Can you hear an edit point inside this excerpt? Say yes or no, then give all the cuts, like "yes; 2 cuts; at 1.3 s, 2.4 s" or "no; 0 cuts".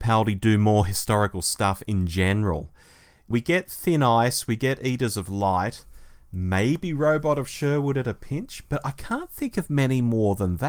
no; 0 cuts